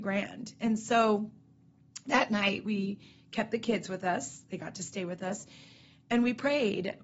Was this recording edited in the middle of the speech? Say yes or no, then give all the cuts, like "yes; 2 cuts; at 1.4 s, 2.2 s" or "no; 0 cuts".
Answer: no; 0 cuts